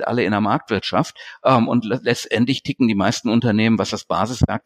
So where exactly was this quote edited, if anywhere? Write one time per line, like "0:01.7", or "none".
none